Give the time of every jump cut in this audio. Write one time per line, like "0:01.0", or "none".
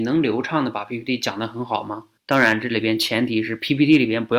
0:02.2